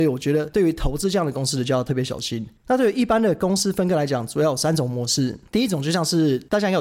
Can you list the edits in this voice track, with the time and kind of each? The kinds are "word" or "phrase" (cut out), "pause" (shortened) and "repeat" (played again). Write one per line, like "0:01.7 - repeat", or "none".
0:02.6 - pause